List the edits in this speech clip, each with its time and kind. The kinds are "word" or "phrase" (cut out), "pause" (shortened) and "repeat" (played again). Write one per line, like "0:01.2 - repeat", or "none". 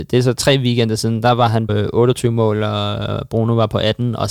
0:01.7 - word